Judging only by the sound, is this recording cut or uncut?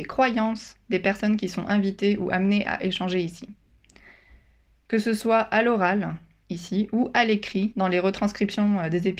uncut